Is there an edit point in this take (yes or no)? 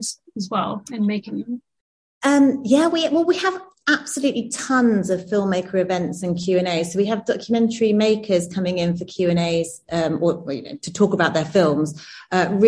no